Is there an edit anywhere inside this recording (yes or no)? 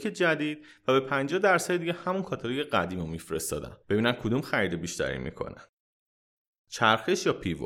yes